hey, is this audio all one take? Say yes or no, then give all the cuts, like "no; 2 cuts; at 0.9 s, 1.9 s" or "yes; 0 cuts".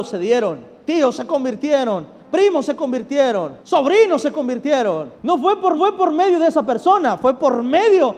no; 3 cuts; at 3.6 s, 5.1 s, 5.8 s